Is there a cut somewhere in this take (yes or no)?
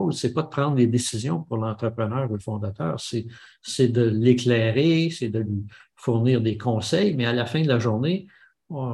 no